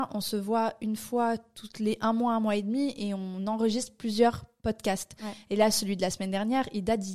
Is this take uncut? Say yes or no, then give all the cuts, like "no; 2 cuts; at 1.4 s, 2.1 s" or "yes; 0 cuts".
yes; 0 cuts